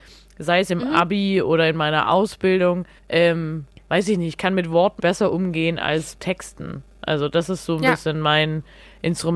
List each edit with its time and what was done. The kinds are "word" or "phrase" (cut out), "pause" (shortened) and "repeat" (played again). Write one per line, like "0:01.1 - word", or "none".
0:03.0 - pause
0:05.0 - word
0:06.1 - word